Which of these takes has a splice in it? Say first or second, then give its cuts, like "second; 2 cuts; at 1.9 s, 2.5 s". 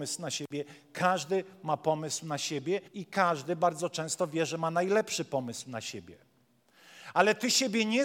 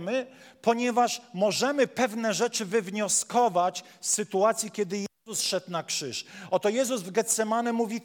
first; 1 cut; at 2.9 s